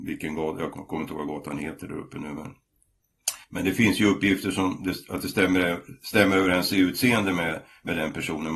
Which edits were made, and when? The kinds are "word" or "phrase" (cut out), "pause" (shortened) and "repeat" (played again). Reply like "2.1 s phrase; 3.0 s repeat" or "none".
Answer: 3.4 s pause